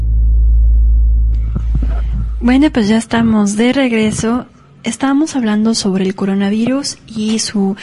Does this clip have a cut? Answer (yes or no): no